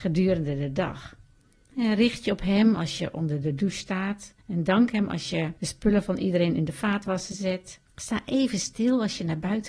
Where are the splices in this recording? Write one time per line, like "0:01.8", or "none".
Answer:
0:01.4
0:04.4
0:05.6
0:07.9